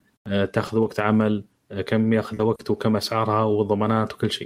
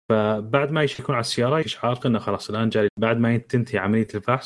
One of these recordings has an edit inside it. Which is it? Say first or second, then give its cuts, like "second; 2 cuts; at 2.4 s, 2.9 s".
second; 3 cuts; at 1.6 s, 2.0 s, 2.9 s